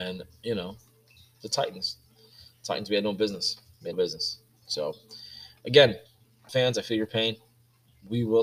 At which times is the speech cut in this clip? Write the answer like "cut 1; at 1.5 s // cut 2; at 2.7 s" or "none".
cut 1; at 3.9 s // cut 2; at 6.5 s